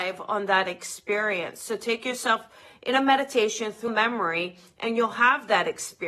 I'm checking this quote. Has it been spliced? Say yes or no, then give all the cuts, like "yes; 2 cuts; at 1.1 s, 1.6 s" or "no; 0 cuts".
yes; 1 cut; at 3.9 s